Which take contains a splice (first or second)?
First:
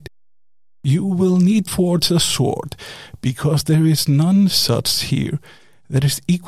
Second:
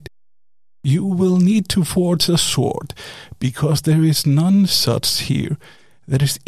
first